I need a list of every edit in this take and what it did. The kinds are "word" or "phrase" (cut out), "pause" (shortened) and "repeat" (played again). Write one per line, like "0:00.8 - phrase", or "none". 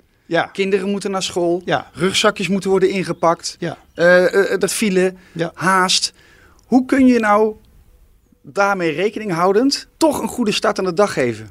0:04.7 - word
0:09.9 - pause